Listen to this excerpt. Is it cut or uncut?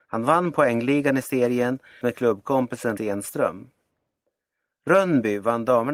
cut